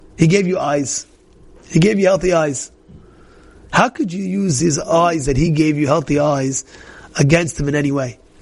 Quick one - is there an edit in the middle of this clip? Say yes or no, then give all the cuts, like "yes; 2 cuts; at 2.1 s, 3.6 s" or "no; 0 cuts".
no; 0 cuts